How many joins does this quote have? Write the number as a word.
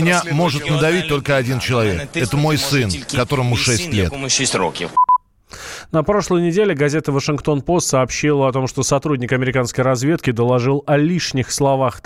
zero